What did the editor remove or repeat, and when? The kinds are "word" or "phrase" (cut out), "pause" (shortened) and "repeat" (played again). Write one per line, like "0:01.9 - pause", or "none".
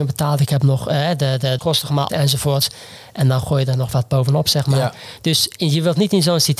0:01.6 - word
0:02.1 - word